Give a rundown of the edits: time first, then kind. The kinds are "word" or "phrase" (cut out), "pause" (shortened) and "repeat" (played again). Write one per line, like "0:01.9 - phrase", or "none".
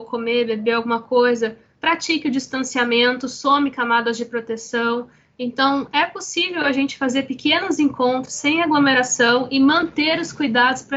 none